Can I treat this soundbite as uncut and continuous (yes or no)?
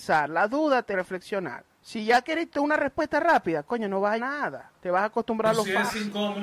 no